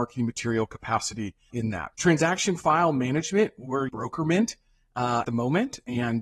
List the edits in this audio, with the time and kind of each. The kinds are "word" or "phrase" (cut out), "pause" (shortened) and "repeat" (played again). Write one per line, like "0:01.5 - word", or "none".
0:01.5 - word
0:01.9 - pause
0:03.9 - word
0:05.2 - word